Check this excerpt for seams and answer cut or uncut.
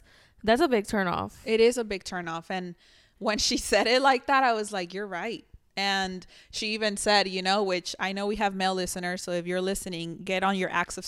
uncut